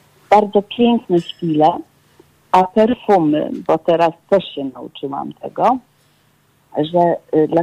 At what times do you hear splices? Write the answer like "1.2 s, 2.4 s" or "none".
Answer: none